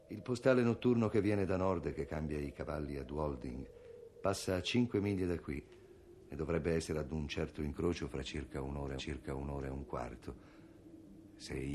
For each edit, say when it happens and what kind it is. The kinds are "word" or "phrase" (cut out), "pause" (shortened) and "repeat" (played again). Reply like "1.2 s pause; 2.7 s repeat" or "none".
9.0 s repeat